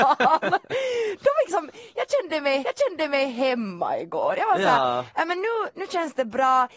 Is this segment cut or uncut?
cut